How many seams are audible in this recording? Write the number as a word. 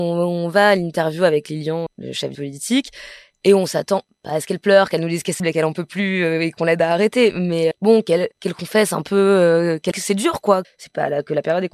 seven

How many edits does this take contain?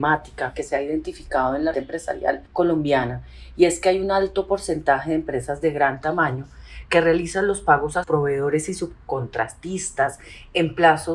three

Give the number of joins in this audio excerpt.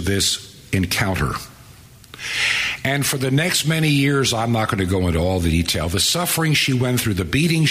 zero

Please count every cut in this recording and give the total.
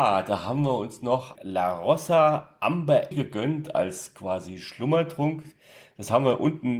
two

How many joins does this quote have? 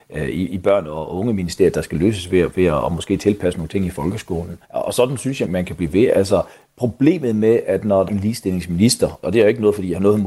four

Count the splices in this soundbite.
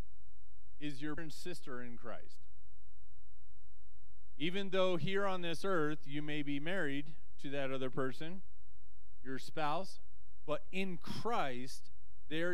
one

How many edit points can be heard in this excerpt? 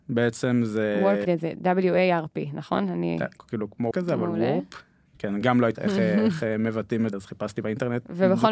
six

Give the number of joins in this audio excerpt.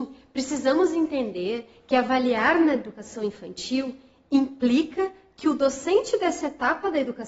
zero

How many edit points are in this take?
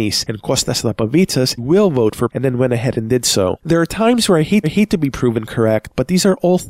three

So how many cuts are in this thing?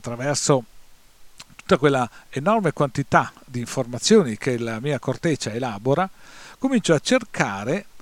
zero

